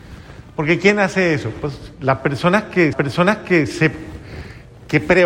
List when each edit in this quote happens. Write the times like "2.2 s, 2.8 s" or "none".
2.9 s